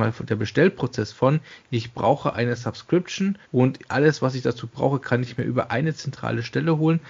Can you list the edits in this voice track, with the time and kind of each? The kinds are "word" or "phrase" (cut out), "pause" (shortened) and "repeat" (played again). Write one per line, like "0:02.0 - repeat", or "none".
0:03.4 - pause